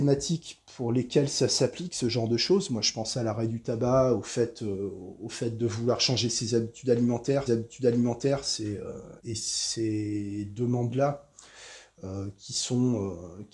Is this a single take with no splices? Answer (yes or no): no